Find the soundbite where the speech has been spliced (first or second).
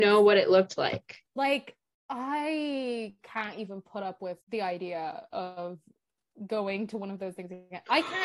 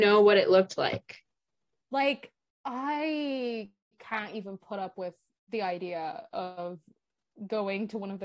first